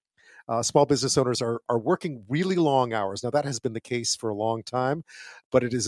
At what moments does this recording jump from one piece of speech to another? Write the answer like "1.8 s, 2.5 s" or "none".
none